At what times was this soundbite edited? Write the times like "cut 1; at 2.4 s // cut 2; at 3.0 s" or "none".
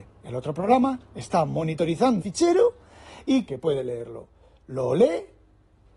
cut 1; at 2.2 s // cut 2; at 3.5 s